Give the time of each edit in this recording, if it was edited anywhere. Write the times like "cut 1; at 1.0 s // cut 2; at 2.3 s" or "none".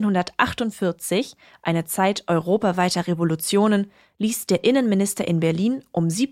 none